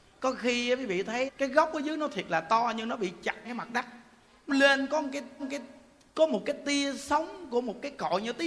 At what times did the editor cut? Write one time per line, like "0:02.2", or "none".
0:01.3
0:03.4
0:04.5
0:05.4